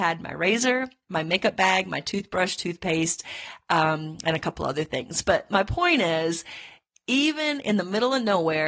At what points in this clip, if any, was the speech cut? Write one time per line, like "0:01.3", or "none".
none